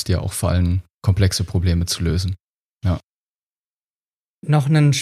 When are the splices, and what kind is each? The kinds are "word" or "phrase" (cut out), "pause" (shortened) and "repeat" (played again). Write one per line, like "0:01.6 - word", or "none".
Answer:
0:00.9 - pause
0:02.6 - pause